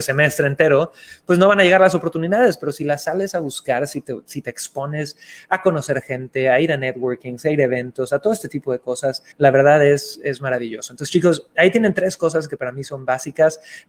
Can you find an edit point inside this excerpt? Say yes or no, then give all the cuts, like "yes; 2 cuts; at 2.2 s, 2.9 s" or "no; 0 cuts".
yes; 1 cut; at 9.3 s